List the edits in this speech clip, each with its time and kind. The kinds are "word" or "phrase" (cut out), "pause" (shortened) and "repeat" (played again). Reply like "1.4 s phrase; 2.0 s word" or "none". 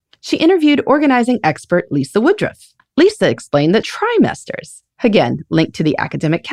2.8 s pause; 3.8 s phrase; 4.9 s pause